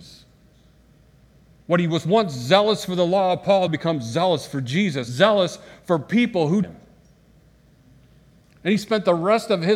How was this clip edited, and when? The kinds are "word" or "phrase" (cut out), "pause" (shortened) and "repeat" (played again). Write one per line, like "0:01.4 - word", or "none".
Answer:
0:03.7 - word
0:05.1 - word
0:06.6 - phrase